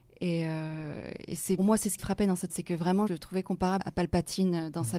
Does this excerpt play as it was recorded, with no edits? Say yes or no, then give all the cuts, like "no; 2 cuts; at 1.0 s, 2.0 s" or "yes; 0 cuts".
no; 5 cuts; at 1.6 s, 2.0 s, 2.5 s, 3.1 s, 3.8 s